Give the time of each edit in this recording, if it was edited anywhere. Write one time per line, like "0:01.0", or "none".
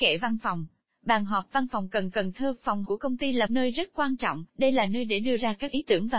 0:02.1
0:02.8
0:03.5
0:04.5